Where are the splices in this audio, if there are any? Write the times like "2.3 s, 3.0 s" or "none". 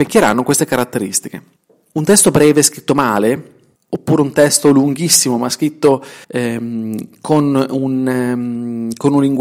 1.6 s, 3.8 s, 6.2 s